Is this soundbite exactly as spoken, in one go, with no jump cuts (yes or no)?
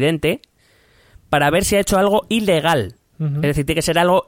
no